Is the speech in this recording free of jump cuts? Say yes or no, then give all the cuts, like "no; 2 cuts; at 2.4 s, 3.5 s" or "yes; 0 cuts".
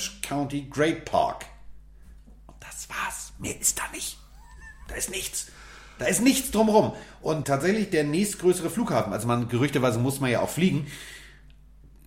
no; 1 cut; at 7.4 s